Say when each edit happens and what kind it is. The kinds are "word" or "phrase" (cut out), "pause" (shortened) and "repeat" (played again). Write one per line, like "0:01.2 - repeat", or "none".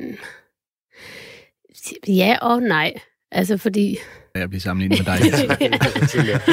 0:04.4 - phrase